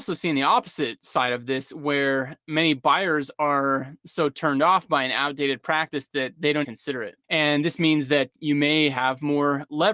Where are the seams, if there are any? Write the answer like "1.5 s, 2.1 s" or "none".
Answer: 6.6 s, 7.2 s